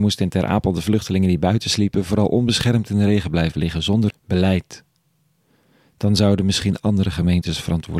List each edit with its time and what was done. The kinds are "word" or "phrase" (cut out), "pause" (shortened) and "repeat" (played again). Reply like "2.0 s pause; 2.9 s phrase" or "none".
4.1 s word